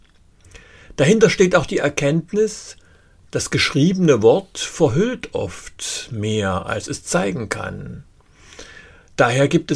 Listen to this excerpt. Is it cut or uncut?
uncut